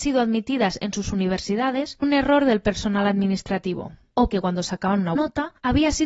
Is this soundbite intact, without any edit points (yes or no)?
no